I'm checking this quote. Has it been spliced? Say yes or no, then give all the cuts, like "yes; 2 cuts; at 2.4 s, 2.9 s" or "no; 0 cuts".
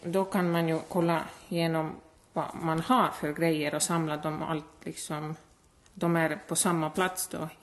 no; 0 cuts